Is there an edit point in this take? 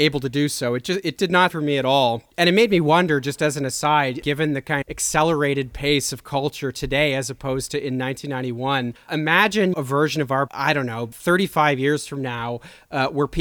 yes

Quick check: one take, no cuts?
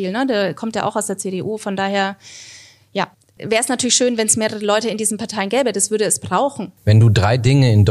no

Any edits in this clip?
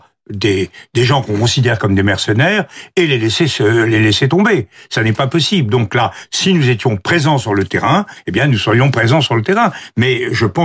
no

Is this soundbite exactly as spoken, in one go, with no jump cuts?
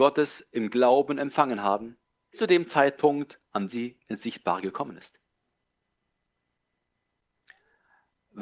no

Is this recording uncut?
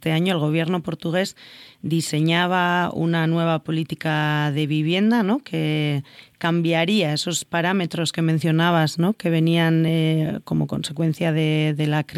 yes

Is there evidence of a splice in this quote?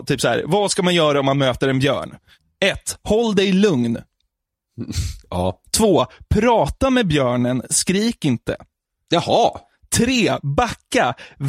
no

